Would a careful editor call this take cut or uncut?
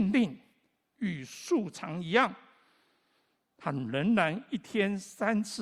uncut